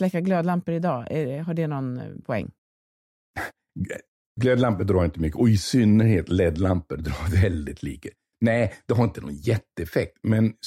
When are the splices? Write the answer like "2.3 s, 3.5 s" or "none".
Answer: none